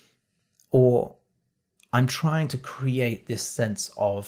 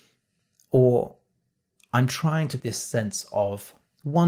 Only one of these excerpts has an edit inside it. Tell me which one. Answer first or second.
second